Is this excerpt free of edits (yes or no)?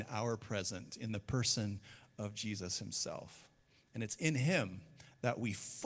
yes